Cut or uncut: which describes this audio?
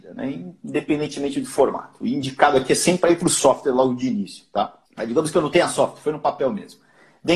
cut